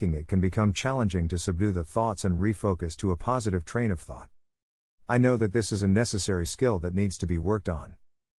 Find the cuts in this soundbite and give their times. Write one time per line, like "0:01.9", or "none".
none